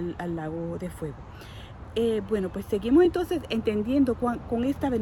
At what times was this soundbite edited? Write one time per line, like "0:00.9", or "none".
none